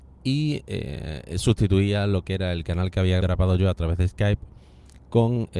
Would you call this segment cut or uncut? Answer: cut